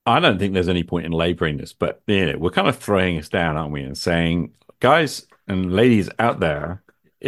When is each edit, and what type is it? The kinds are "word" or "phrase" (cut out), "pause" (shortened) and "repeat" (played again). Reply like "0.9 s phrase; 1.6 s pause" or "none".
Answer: 2.0 s pause; 4.7 s word